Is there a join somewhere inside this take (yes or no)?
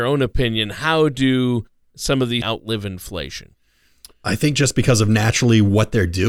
yes